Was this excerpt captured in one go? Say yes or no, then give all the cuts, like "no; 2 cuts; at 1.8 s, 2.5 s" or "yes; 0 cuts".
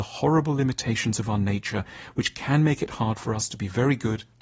yes; 0 cuts